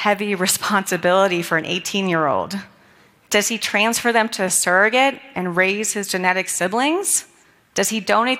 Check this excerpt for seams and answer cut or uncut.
uncut